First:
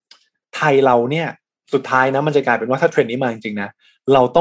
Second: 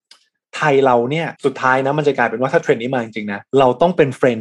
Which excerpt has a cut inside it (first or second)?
second